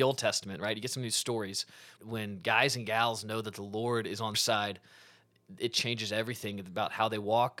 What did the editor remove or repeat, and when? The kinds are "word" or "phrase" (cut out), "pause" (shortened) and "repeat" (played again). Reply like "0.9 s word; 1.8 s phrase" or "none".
2.0 s word; 4.3 s word